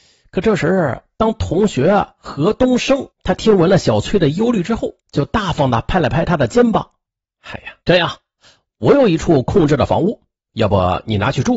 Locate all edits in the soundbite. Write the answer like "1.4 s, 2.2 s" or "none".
3.1 s, 5.0 s, 7.8 s